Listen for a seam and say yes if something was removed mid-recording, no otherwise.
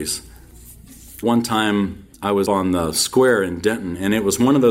yes